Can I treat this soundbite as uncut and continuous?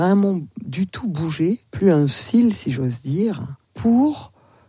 no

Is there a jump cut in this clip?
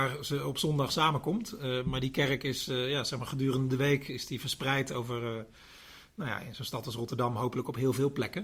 no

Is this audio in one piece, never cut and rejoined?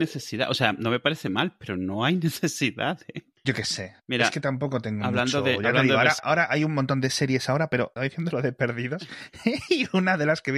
no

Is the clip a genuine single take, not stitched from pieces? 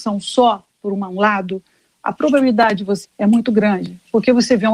no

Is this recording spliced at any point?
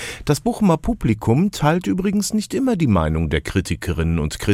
no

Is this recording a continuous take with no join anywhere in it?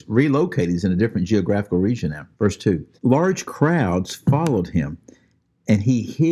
no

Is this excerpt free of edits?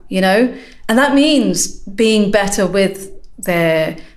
yes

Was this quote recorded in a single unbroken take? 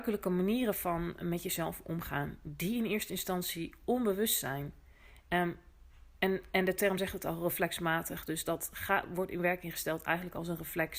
yes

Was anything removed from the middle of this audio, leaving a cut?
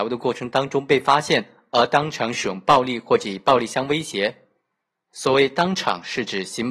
no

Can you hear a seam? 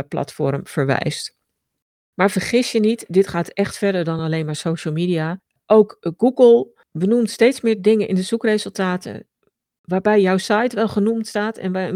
no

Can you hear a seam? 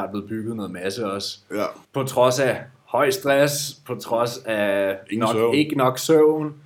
yes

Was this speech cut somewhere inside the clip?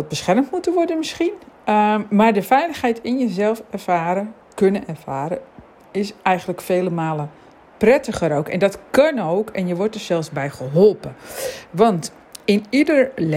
no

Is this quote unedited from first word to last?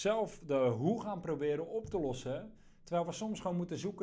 yes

